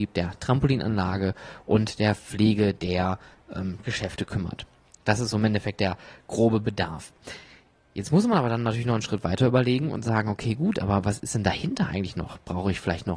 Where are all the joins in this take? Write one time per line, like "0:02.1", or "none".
none